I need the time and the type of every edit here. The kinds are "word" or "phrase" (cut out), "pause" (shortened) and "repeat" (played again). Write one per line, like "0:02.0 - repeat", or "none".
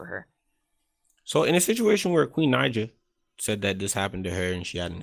none